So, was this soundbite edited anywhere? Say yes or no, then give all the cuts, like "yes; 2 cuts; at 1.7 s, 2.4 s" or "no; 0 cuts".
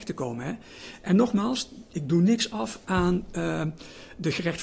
no; 0 cuts